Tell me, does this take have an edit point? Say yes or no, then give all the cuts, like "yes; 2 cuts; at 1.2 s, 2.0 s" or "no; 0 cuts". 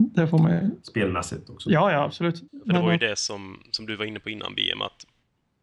yes; 1 cut; at 2.5 s